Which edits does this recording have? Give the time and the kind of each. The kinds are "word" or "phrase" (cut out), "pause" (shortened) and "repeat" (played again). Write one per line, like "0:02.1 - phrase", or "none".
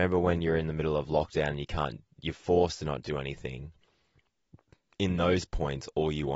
none

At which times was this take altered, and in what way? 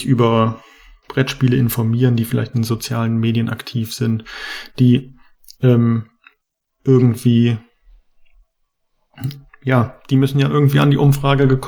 none

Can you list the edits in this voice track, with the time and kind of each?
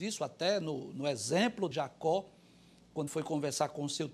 0:01.7 - word
0:03.1 - word

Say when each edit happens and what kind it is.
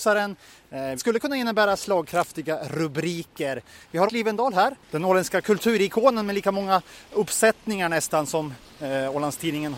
0:01.0 - word
0:04.1 - word

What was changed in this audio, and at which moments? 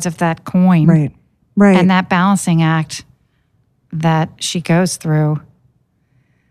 none

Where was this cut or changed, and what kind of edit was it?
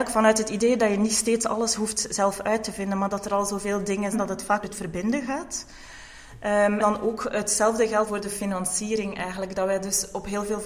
0:04.1 - word
0:04.6 - word
0:06.8 - word
0:08.1 - word

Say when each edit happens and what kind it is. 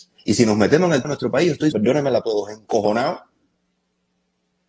0:01.0 - word
0:01.7 - word
0:02.2 - word

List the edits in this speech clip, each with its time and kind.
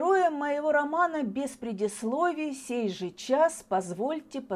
none

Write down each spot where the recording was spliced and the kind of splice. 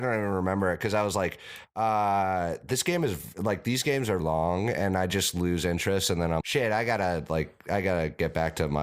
0:04.2 - word
0:06.4 - word

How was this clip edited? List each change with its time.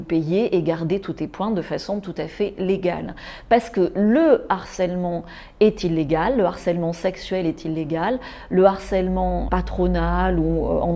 0:09.5 - word

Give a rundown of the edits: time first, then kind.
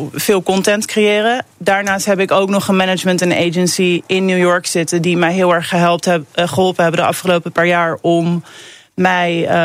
0:01.5 - pause

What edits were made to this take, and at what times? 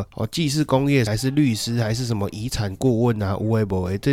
0:01.1 - phrase

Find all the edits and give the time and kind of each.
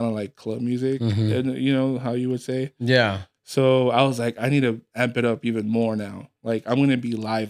0:06.3 - pause

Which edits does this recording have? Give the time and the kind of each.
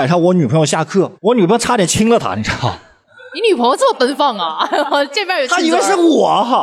0:01.1 - pause

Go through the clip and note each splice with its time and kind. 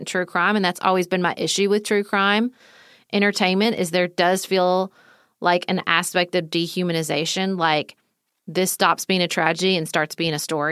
none

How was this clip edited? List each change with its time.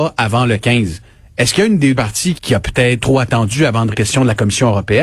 0:02.0 - word
0:02.4 - word
0:03.0 - word
0:03.9 - word

